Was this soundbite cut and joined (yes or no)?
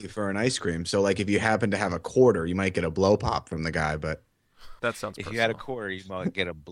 yes